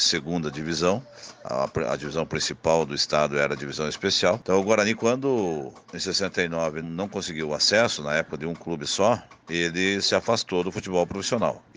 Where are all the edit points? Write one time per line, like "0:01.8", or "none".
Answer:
0:05.8
0:06.8

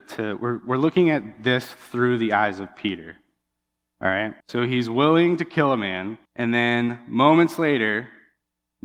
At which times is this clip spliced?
0:04.4
0:06.2

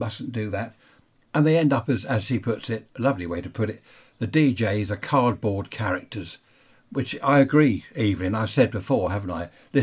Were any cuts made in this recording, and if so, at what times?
none

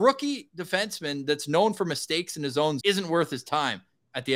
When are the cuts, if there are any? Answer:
0:02.8

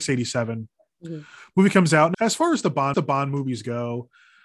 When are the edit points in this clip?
0:02.1
0:02.9

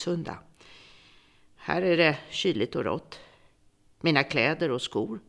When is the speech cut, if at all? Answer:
none

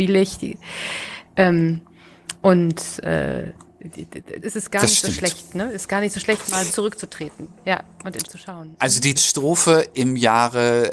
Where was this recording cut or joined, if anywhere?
0:04.4
0:06.7
0:08.2
0:09.2
0:09.9

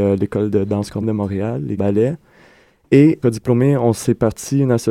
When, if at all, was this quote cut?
0:01.0
0:01.8
0:03.2

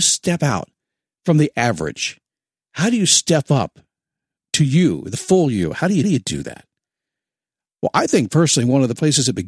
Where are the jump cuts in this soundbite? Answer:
0:06.0

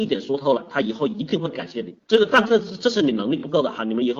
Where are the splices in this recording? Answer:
0:02.0

